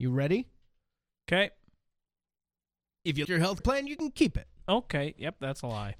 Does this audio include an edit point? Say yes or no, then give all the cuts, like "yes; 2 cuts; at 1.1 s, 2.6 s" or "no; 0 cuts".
yes; 2 cuts; at 3.2 s, 3.6 s